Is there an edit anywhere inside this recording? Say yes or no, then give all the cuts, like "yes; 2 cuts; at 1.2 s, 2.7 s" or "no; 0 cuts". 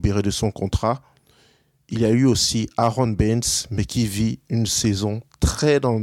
no; 0 cuts